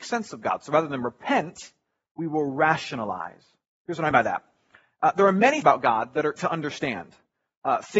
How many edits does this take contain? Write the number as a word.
three